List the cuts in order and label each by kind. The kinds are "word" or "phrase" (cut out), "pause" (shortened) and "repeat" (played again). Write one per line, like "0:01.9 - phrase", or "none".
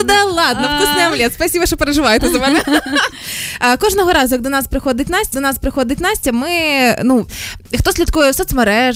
0:05.3 - repeat

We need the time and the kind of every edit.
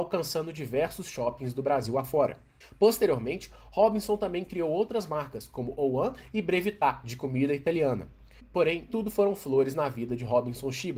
0:08.9 - word

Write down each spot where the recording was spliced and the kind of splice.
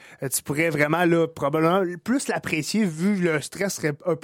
none

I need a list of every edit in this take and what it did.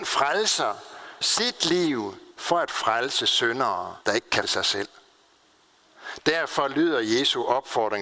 0:01.2 - phrase
0:02.3 - pause
0:04.0 - pause
0:04.4 - word

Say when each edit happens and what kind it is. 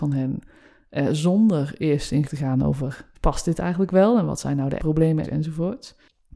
0:02.2 - word
0:03.1 - pause
0:04.8 - word
0:05.2 - word

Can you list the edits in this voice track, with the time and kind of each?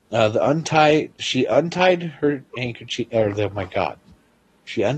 0:01.1 - pause

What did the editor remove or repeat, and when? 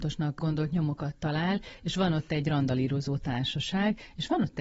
none

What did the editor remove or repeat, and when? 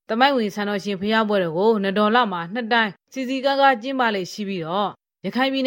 0:03.0 - pause

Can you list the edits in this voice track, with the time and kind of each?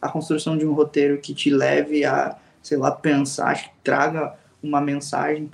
none

